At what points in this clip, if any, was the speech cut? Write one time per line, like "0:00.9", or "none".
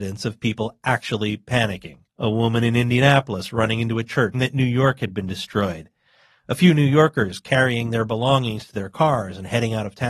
0:02.1
0:04.3